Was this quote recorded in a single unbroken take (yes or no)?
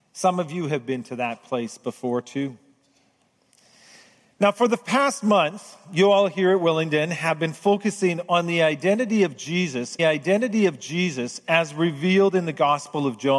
no